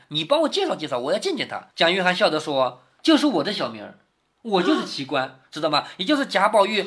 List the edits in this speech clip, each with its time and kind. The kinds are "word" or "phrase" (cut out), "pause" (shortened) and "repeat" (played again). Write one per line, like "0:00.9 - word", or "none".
0:01.7 - pause

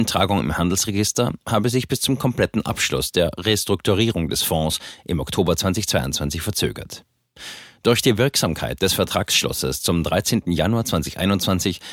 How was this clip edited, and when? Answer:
none

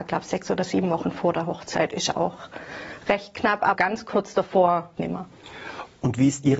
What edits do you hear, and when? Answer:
0:03.7 - word
0:05.0 - word

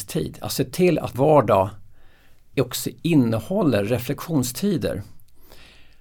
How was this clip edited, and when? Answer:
0:01.1 - word
0:02.5 - word

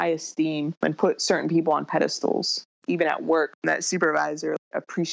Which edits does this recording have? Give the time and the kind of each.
0:03.6 - word

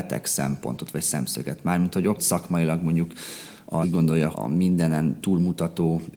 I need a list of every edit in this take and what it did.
0:02.2 - word
0:03.8 - word
0:04.3 - word

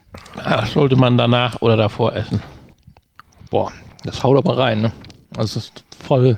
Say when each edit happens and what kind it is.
none

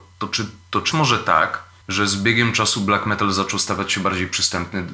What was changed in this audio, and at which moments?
0:00.9 - word
0:01.8 - pause

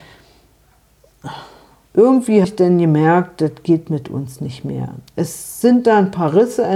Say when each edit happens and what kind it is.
0:02.4 - word

